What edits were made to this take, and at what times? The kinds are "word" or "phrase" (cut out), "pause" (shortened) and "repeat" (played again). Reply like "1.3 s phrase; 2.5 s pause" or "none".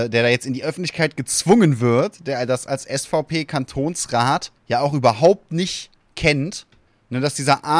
4.6 s pause; 6.9 s pause